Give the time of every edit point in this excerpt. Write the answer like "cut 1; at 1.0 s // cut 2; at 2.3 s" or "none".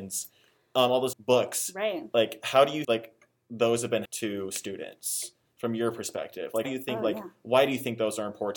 cut 1; at 1.1 s // cut 2; at 2.8 s // cut 3; at 4.0 s // cut 4; at 6.6 s